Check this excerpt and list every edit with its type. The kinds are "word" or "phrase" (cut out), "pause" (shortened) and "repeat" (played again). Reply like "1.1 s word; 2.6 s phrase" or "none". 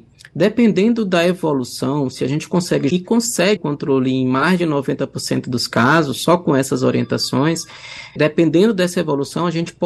2.9 s phrase; 3.6 s word; 8.2 s word